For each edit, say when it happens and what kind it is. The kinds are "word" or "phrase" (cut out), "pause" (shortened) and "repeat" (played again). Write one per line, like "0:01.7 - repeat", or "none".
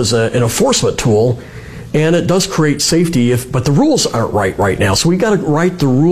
none